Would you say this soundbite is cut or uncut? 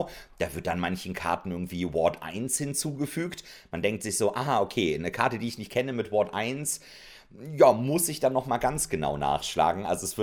uncut